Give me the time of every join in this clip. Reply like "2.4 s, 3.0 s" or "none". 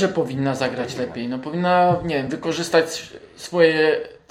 none